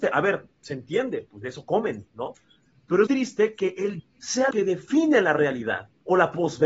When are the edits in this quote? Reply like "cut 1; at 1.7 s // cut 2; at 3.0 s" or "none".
cut 1; at 3.1 s // cut 2; at 4.0 s // cut 3; at 4.5 s